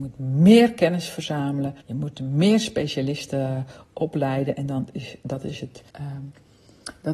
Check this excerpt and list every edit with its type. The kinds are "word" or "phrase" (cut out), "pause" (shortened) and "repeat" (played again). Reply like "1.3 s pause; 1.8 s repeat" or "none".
1.8 s pause; 5.9 s pause